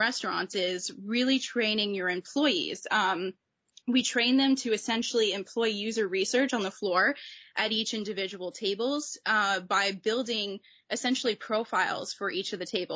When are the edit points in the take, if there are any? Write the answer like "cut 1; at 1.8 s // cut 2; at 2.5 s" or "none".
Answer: none